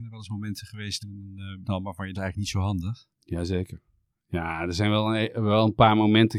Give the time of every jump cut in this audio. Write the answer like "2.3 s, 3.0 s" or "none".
1.0 s, 1.6 s, 2.1 s, 3.1 s